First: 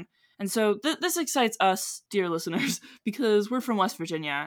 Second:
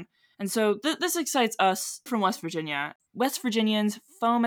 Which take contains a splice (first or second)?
second